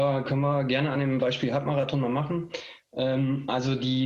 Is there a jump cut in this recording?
no; 0 cuts

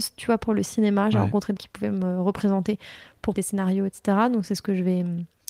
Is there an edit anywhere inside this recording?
yes; 2 cuts; at 1.6 s, 3.4 s

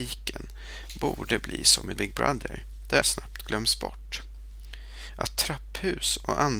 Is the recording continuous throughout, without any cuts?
no; 2 cuts; at 2.0 s, 3.0 s

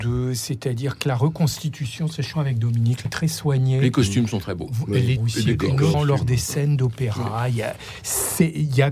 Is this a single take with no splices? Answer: no; 4 cuts; at 2.3 s, 3.0 s, 5.2 s, 5.9 s

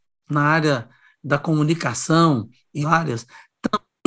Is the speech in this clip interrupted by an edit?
yes; 1 cut; at 2.8 s

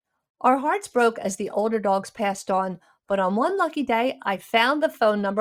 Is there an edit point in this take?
no; 0 cuts

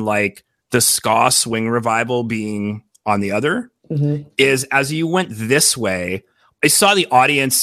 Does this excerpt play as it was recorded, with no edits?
yes; 0 cuts

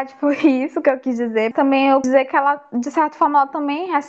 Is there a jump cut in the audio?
yes; 2 cuts; at 1.5 s, 2.0 s

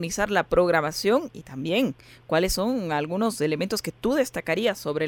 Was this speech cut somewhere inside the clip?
no; 0 cuts

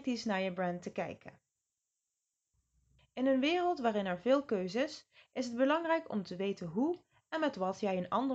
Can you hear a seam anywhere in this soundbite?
no; 0 cuts

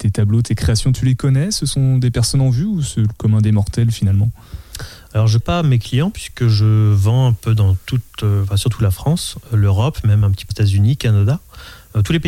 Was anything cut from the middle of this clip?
yes; 4 cuts; at 0.9 s, 5.4 s, 8.1 s, 10.5 s

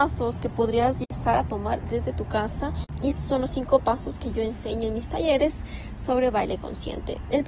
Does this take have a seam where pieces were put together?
no; 0 cuts

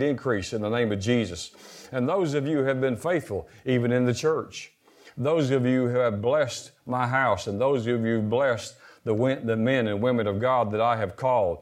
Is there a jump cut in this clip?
no; 0 cuts

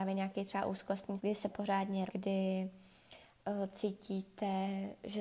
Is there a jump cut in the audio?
yes; 3 cuts; at 1.2 s, 1.5 s, 2.1 s

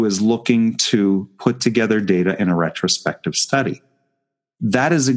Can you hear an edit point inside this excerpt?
no; 0 cuts

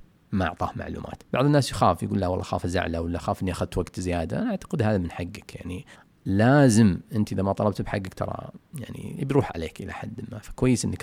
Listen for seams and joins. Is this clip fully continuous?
no; 2 cuts; at 1.3 s, 5.9 s

